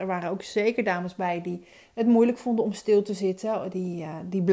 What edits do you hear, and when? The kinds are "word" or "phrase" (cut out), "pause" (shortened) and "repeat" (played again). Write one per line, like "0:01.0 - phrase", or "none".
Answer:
none